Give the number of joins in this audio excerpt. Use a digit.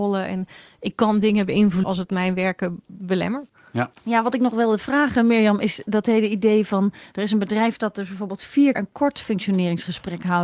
3